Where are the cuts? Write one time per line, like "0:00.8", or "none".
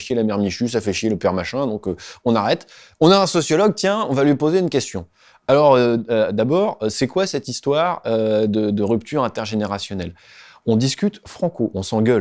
none